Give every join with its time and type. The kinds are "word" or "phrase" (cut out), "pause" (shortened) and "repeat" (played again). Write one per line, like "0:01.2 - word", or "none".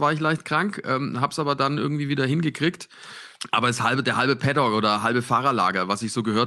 none